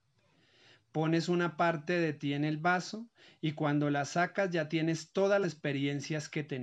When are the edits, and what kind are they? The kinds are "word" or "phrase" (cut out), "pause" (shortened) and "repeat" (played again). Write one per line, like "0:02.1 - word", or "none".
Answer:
0:05.4 - word